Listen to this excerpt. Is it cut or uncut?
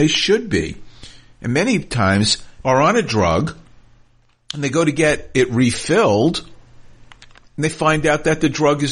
cut